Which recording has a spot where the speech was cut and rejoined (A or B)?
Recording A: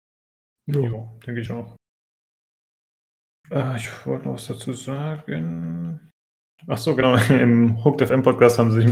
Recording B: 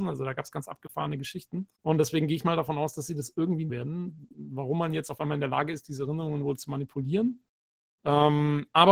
B